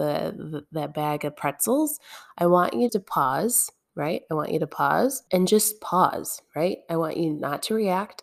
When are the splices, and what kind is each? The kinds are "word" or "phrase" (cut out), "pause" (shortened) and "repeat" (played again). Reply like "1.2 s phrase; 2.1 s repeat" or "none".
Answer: 2.9 s word; 5.3 s pause